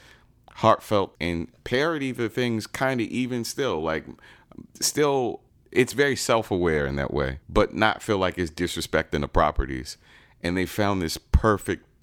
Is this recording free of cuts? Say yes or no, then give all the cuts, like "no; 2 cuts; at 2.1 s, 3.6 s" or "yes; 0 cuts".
no; 3 cuts; at 1.2 s, 5.5 s, 7.4 s